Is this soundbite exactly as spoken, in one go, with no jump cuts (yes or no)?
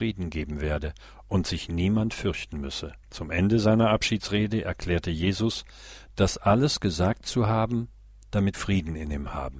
no